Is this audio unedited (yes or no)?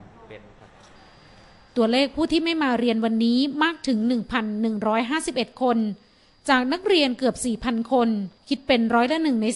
no